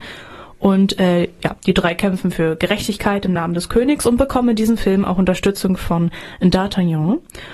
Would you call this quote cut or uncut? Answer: uncut